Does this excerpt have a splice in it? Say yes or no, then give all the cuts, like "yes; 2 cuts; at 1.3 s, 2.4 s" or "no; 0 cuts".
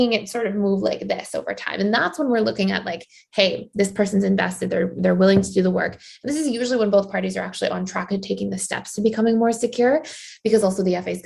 no; 0 cuts